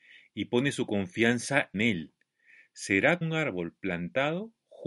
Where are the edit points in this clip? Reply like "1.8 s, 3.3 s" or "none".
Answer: 1.7 s, 3.2 s